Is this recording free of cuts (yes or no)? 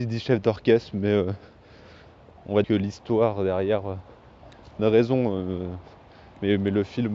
no